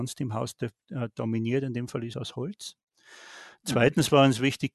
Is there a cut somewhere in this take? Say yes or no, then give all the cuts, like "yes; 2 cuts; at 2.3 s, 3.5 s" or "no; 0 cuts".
yes; 1 cut; at 2.1 s